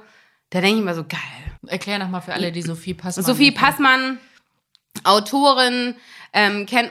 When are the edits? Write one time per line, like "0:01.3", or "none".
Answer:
0:01.6